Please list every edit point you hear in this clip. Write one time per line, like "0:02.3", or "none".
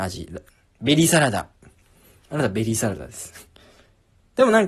none